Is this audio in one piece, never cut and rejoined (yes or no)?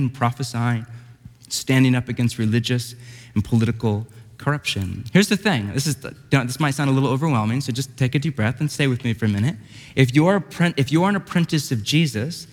yes